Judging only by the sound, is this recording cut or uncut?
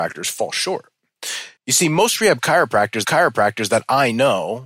cut